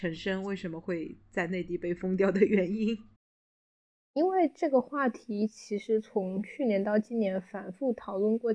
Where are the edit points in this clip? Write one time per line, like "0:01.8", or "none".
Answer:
none